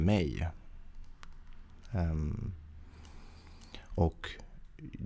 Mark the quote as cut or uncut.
uncut